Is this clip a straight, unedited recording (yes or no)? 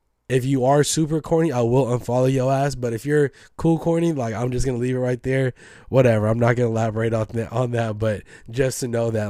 yes